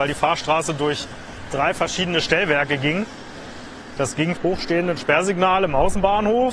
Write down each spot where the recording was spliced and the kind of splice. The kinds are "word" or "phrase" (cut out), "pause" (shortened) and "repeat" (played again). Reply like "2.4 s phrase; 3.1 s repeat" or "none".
4.4 s word